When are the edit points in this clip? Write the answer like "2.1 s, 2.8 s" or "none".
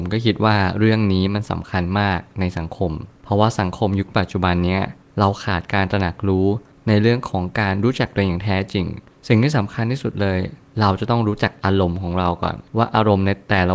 12.7 s